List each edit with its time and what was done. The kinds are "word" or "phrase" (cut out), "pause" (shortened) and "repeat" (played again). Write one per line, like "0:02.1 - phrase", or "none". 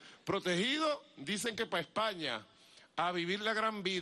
none